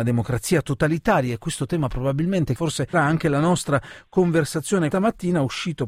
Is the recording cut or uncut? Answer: cut